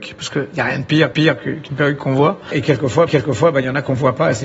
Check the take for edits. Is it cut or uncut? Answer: cut